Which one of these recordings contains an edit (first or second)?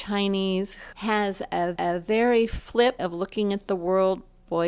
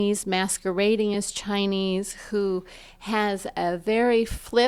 first